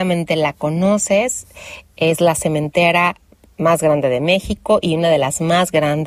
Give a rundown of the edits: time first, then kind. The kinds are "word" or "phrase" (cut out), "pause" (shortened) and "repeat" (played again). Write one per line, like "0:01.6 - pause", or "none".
none